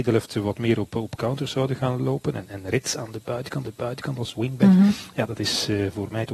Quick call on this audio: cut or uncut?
cut